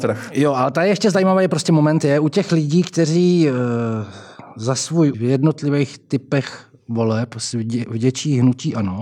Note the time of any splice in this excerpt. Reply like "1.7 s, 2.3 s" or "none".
5.1 s